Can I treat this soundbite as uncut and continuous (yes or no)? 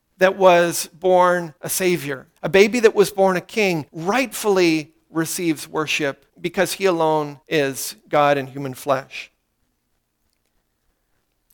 no